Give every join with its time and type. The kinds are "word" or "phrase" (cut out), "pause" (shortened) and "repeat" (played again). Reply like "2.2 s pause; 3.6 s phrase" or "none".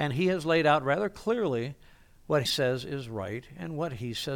2.5 s word